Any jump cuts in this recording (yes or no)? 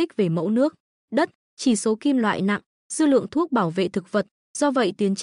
no